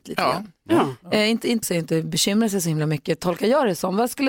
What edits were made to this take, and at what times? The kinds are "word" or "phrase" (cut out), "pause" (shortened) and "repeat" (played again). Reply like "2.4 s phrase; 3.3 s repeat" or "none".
1.6 s word